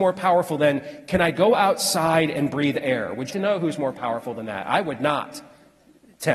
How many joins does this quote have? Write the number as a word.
one